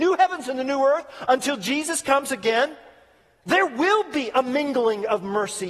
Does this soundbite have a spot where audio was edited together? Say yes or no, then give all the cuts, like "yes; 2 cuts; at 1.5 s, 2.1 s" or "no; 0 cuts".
no; 0 cuts